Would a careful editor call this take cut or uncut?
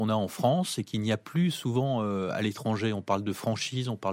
uncut